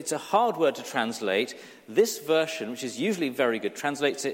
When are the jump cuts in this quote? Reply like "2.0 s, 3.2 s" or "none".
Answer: none